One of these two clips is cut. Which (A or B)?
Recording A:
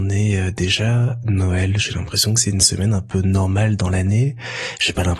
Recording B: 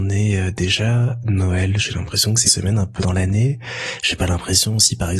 B